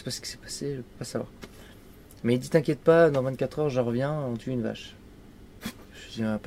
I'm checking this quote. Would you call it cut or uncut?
uncut